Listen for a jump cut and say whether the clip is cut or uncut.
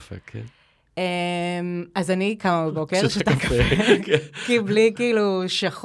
uncut